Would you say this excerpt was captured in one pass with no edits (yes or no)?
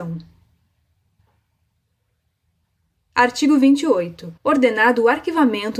no